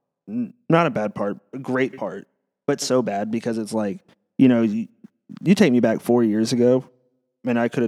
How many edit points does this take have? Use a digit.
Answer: 0